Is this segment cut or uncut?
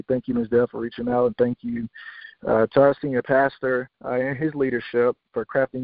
cut